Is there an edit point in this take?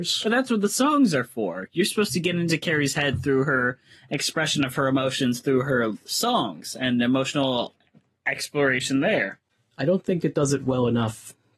no; 0 cuts

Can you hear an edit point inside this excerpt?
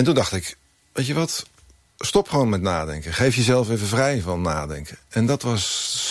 no; 0 cuts

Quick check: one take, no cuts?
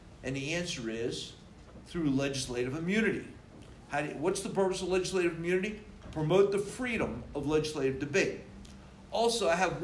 yes; 0 cuts

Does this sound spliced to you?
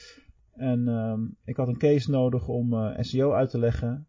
no; 0 cuts

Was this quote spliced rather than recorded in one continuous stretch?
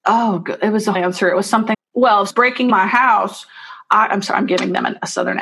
yes; 4 cuts; at 0.9 s, 1.7 s, 2.3 s, 2.7 s

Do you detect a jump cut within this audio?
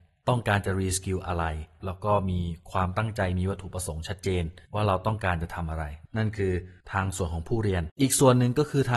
yes; 3 cuts; at 4.7 s, 6.8 s, 7.9 s

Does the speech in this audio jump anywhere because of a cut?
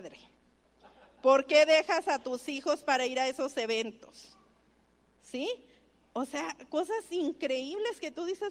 no; 0 cuts

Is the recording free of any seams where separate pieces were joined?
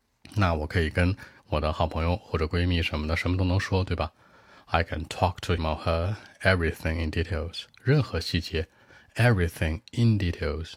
no; 1 cut; at 5.6 s

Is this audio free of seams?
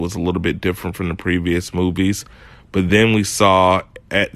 yes; 0 cuts

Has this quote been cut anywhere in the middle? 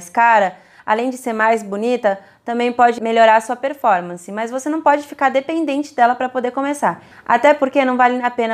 no; 0 cuts

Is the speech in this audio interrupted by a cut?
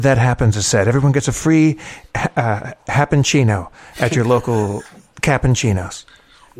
no; 0 cuts

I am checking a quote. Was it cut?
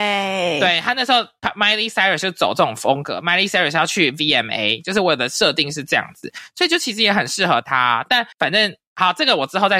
yes; 1 cut; at 8.3 s

